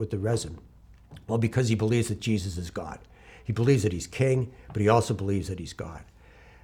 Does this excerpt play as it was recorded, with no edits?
yes; 0 cuts

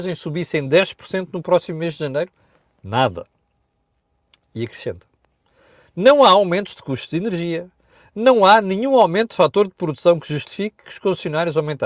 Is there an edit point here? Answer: no; 0 cuts

